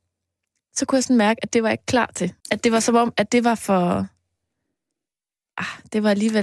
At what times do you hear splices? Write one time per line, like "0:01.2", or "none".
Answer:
0:02.4